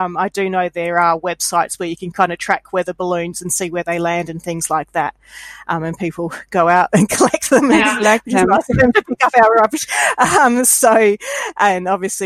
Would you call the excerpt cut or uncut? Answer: uncut